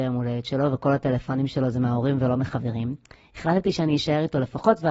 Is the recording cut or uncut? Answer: uncut